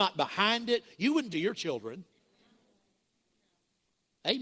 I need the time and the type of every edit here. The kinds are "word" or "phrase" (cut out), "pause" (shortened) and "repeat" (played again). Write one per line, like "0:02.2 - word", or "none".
0:01.3 - phrase